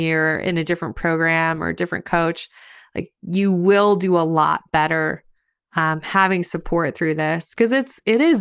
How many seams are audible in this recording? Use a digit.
0